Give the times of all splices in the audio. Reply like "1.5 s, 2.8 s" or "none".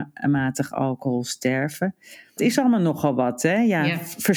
2.4 s